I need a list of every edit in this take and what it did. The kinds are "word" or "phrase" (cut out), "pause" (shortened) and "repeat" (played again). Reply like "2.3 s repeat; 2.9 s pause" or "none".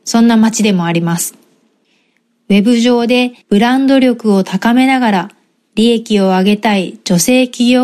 3.4 s pause